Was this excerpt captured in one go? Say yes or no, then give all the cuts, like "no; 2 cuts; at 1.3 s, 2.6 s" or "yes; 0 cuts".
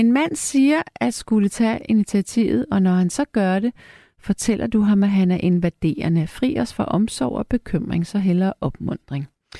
yes; 0 cuts